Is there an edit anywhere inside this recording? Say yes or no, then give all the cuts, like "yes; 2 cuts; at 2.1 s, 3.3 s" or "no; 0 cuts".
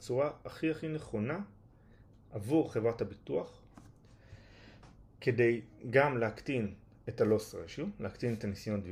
no; 0 cuts